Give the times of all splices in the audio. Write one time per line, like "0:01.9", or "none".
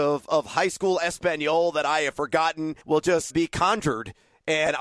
0:02.8
0:03.3